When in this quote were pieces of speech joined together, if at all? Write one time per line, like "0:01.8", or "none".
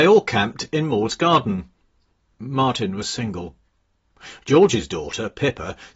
none